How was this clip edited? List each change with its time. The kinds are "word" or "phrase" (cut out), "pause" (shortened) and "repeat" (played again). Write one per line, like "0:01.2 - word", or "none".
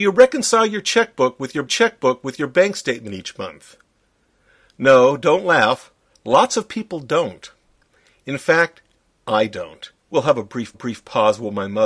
0:01.7 - repeat
0:10.0 - pause
0:10.7 - repeat